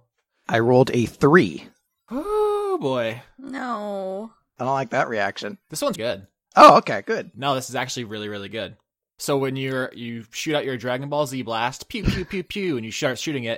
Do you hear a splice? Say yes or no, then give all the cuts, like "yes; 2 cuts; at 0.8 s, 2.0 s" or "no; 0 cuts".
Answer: yes; 1 cut; at 5.9 s